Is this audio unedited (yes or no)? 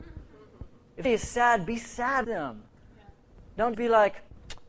no